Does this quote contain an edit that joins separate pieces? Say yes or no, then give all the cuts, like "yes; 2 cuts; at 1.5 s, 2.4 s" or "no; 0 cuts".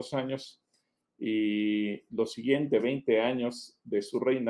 no; 0 cuts